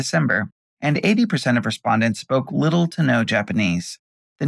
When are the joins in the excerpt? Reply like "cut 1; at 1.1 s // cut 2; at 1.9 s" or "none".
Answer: none

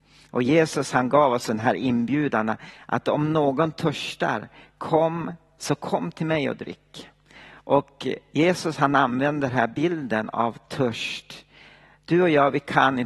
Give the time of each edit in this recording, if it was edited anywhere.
none

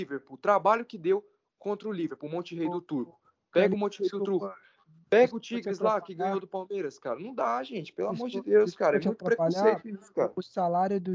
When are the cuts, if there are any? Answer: none

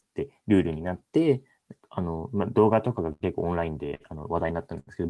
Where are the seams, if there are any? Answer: none

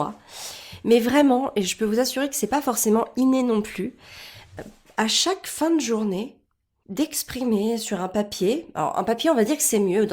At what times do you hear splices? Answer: cut 1; at 6.8 s

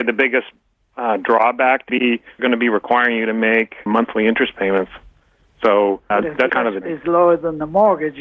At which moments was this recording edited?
cut 1; at 1.9 s // cut 2; at 2.4 s // cut 3; at 3.9 s // cut 4; at 6.1 s // cut 5; at 6.5 s // cut 6; at 6.8 s

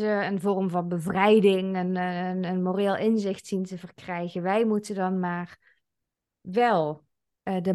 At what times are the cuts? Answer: none

